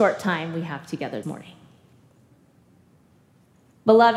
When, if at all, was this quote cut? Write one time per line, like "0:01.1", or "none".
0:01.2